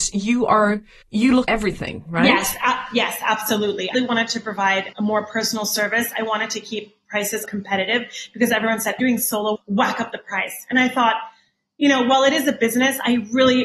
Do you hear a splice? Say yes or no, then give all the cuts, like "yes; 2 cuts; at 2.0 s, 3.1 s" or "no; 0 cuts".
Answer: yes; 7 cuts; at 1.0 s, 1.5 s, 3.9 s, 4.9 s, 7.4 s, 9.0 s, 9.5 s